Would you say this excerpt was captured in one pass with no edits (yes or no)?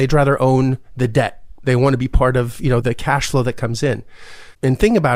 yes